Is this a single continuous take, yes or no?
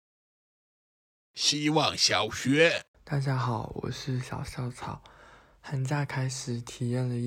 no